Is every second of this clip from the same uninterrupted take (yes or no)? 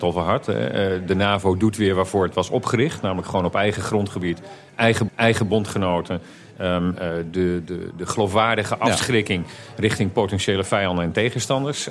no